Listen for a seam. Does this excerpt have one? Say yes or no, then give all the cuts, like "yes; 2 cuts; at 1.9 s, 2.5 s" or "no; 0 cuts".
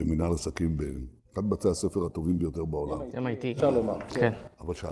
no; 0 cuts